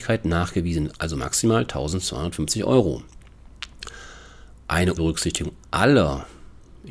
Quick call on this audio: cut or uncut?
cut